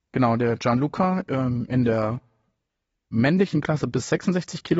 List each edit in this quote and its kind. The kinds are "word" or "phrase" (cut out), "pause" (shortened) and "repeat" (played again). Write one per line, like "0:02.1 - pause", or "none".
none